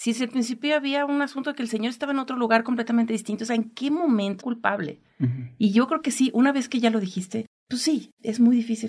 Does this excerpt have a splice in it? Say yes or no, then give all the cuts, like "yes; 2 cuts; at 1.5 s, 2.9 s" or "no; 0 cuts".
yes; 1 cut; at 4.4 s